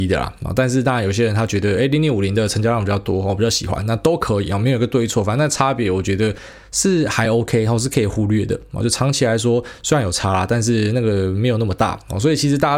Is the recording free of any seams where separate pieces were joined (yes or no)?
yes